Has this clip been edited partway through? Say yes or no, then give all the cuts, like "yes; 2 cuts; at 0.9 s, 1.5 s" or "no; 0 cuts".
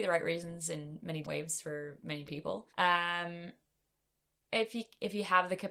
yes; 3 cuts; at 1.2 s, 2.3 s, 2.7 s